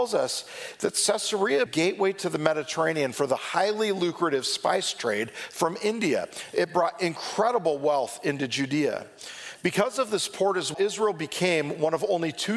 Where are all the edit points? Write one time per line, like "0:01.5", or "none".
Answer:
0:01.7
0:10.7

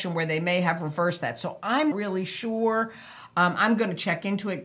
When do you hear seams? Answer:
0:01.9

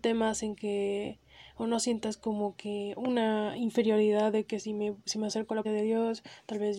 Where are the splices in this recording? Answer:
0:05.6

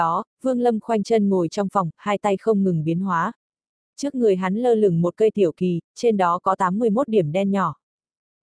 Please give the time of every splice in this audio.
none

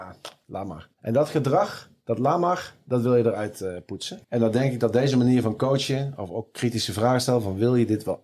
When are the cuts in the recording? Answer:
0:00.9
0:04.2

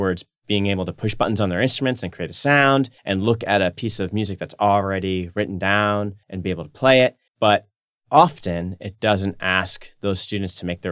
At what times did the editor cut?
0:03.0
0:06.2
0:07.3

